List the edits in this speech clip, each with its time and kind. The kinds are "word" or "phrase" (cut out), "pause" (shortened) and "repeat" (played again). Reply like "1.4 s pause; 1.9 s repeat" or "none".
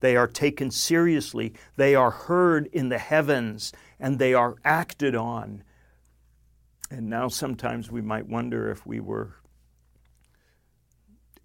none

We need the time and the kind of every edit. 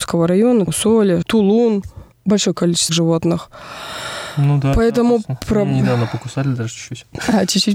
1.2 s word; 2.1 s pause; 2.9 s word

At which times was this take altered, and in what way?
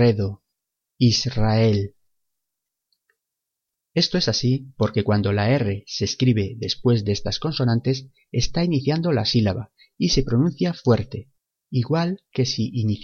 none

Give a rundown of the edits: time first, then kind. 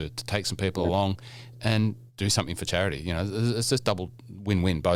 2.1 s pause

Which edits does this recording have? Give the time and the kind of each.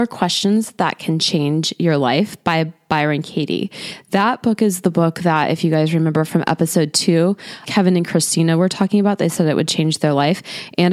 7.6 s word

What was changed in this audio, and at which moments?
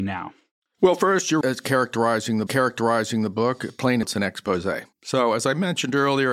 1.4 s word; 2.5 s repeat; 4.0 s phrase; 4.9 s pause

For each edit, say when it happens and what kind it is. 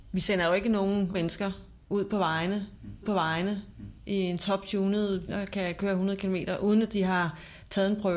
1.1 s word; 1.8 s pause; 3.0 s repeat; 5.3 s word

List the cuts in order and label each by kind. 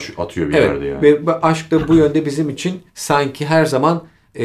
2.9 s pause

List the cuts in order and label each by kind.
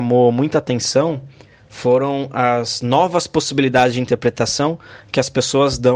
none

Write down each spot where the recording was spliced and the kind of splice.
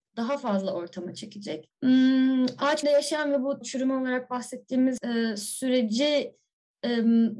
2.8 s word; 3.6 s word

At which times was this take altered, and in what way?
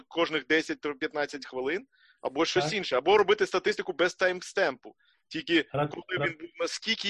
none

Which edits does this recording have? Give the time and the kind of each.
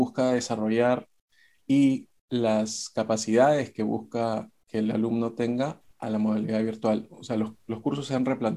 2.2 s pause

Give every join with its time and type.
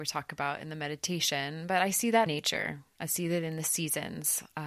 2.3 s word

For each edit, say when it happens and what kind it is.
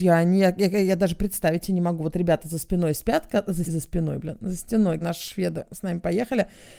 3.6 s word; 5.0 s word

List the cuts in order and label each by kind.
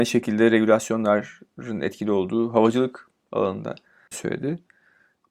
4.1 s word

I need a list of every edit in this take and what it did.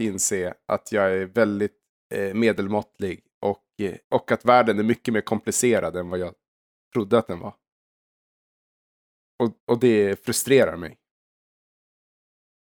1.9 s pause; 4.0 s pause; 9.6 s pause

